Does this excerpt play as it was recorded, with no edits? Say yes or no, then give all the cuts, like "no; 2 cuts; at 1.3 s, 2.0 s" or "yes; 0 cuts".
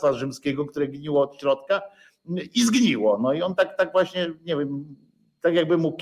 yes; 0 cuts